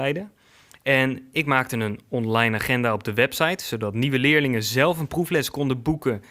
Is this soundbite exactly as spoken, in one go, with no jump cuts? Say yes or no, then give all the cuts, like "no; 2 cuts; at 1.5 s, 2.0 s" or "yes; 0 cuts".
yes; 0 cuts